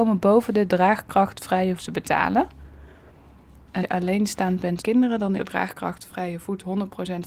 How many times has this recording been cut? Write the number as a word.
four